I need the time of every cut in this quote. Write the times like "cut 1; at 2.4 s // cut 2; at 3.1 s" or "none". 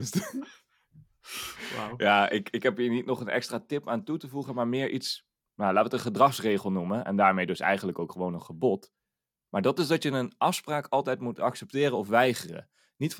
none